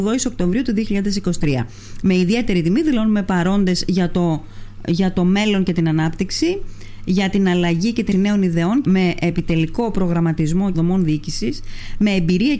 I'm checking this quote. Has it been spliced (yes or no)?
yes